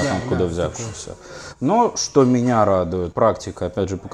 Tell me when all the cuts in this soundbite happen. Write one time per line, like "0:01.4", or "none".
0:03.1